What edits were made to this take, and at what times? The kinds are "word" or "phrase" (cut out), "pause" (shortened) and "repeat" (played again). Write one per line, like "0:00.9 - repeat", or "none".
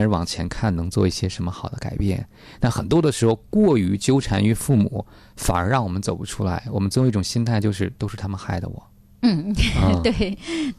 none